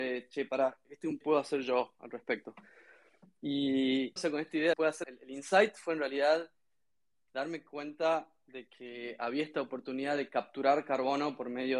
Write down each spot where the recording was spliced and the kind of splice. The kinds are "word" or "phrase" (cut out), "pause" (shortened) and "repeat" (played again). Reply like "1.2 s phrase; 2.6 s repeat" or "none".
1.2 s phrase; 4.2 s phrase; 4.7 s phrase; 5.0 s word